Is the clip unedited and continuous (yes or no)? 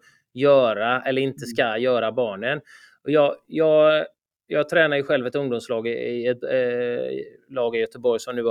yes